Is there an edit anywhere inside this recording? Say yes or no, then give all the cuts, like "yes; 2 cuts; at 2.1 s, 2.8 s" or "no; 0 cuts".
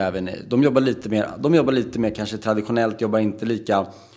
no; 0 cuts